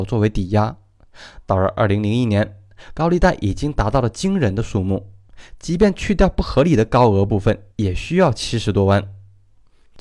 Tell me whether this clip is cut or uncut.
cut